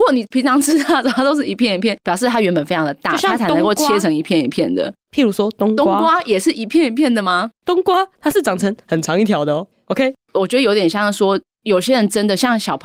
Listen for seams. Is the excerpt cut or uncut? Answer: cut